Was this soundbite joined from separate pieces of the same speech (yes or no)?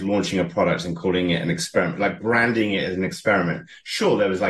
no